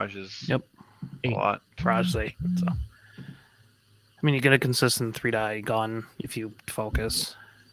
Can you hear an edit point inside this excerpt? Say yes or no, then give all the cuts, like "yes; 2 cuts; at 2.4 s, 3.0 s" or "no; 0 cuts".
yes; 1 cut; at 1.7 s